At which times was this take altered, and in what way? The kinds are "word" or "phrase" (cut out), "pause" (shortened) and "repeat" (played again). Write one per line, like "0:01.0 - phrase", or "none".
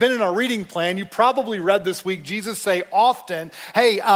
none